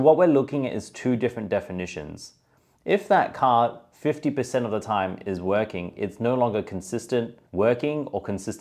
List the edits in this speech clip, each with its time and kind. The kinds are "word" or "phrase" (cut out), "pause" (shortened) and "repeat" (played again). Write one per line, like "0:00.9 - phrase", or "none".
0:07.5 - pause